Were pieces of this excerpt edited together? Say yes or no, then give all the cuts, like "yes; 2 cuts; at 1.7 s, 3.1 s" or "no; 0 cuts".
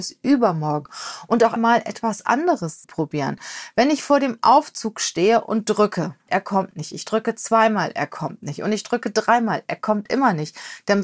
yes; 3 cuts; at 1.6 s, 2.8 s, 6.3 s